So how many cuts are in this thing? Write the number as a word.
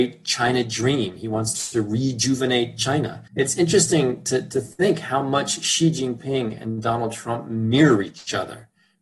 one